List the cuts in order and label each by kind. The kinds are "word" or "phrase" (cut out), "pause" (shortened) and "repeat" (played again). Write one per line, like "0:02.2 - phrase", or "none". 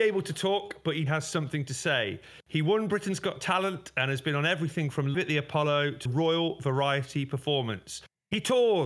0:01.1 - word
0:05.1 - word
0:06.1 - word